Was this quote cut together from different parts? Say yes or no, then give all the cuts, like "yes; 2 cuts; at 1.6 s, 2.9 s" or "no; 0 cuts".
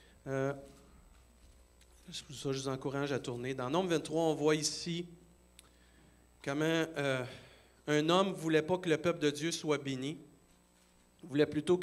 no; 0 cuts